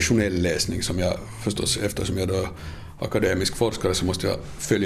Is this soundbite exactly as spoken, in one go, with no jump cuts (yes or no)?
yes